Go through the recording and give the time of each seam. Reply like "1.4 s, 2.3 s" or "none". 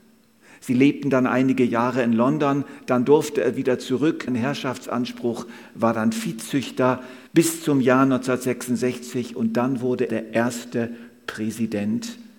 4.3 s, 7.3 s, 10.1 s